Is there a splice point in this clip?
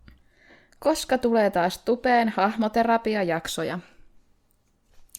no; 0 cuts

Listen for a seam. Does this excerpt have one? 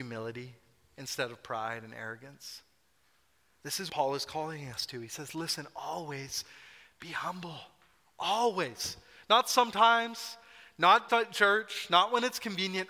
yes; 2 cuts; at 3.9 s, 11.1 s

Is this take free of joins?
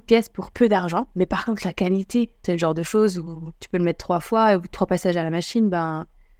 yes; 0 cuts

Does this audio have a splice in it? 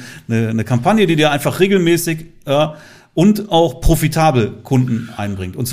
no; 0 cuts

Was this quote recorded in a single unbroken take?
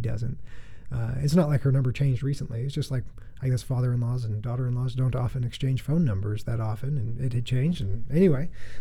yes; 0 cuts

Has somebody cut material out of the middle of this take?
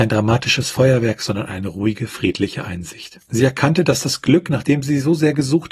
no; 0 cuts

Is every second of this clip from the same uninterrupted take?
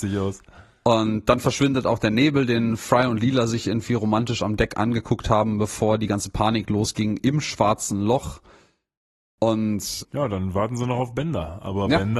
no; 1 cut; at 10.0 s

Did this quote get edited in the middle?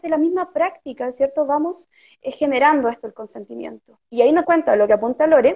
yes; 2 cuts; at 4.1 s, 4.4 s

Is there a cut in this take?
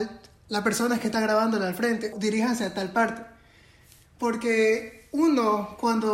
yes; 1 cut; at 2.1 s

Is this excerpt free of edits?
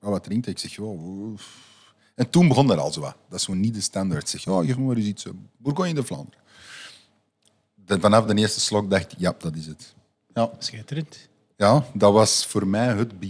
yes; 0 cuts

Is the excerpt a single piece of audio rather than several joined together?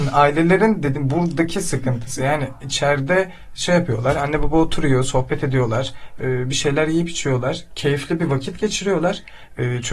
yes; 0 cuts

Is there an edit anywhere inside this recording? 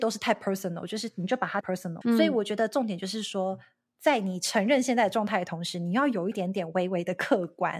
yes; 2 cuts; at 1.6 s, 2.0 s

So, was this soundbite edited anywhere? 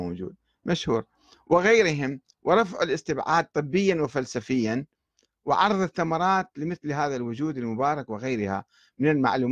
no; 0 cuts

